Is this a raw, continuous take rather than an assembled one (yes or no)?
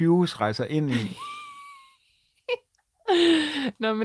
yes